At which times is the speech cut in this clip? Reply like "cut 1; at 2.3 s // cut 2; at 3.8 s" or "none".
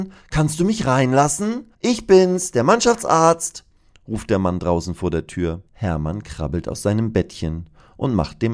cut 1; at 1.7 s // cut 2; at 5.7 s